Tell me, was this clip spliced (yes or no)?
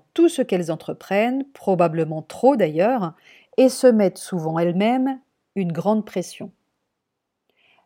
no